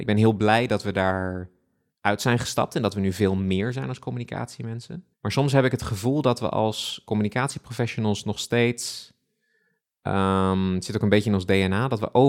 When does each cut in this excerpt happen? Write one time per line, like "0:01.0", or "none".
0:05.1